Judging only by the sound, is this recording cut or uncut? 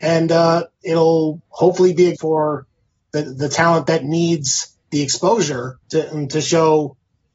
cut